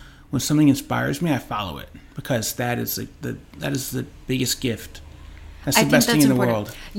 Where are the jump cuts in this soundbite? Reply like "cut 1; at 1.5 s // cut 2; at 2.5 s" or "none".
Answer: cut 1; at 3.5 s